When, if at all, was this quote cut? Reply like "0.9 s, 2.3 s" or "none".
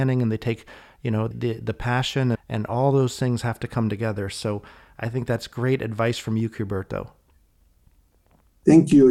1.3 s, 2.3 s